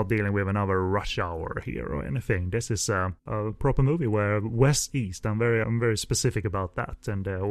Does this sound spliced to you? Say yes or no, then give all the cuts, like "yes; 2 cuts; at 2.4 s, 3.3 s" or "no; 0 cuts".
yes; 3 cuts; at 3.2 s, 4.9 s, 5.6 s